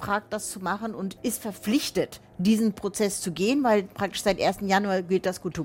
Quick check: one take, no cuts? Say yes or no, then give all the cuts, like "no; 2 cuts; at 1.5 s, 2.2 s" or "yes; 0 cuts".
no; 1 cut; at 1.2 s